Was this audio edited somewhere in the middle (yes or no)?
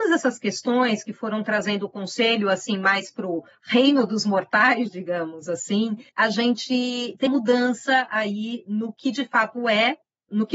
yes